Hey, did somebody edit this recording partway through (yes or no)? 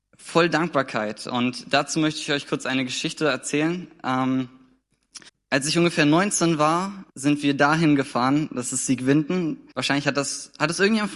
yes